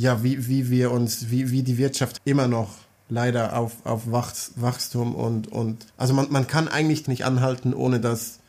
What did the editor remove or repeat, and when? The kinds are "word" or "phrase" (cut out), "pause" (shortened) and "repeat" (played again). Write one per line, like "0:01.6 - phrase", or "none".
0:02.2 - phrase
0:05.9 - pause
0:07.1 - word